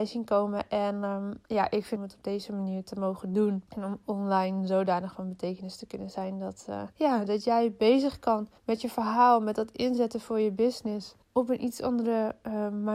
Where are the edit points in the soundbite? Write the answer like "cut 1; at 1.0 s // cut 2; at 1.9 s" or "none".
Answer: cut 1; at 1.4 s // cut 2; at 2.0 s // cut 3; at 3.7 s // cut 4; at 6.9 s // cut 5; at 8.6 s // cut 6; at 11.2 s